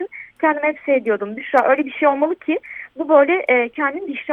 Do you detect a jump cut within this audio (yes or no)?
no